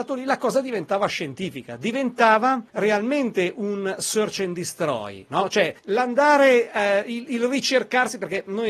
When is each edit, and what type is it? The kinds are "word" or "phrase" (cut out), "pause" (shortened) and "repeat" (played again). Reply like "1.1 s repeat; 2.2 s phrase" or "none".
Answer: 2.7 s pause; 5.8 s pause